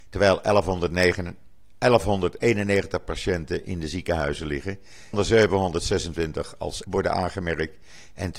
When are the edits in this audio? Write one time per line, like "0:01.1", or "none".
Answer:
0:05.1
0:06.8